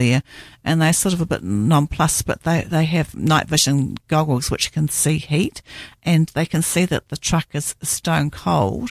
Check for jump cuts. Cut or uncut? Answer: cut